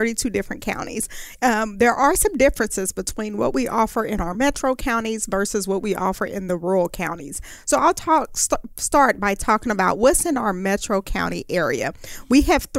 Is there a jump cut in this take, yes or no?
no